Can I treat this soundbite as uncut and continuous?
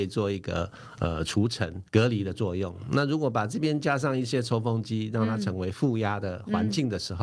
no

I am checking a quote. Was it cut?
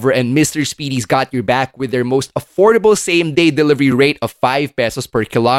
no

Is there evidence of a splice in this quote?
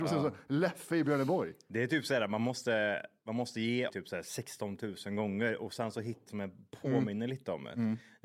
yes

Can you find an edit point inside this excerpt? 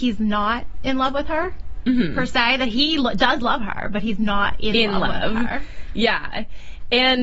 no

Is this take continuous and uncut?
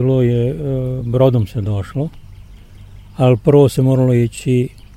yes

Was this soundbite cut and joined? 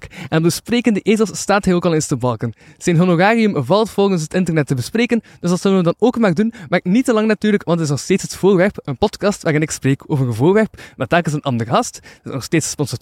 no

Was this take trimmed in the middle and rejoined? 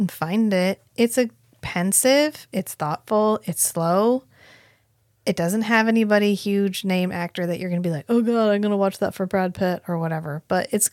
no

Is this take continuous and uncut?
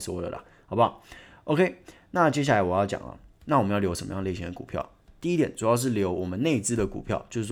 yes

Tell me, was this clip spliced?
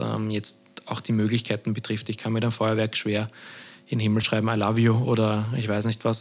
no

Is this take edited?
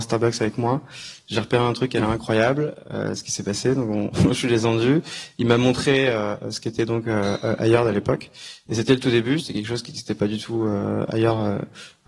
no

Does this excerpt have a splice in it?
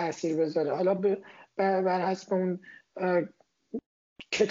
no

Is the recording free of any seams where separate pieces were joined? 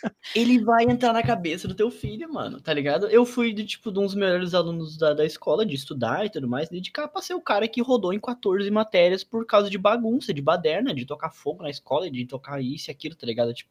yes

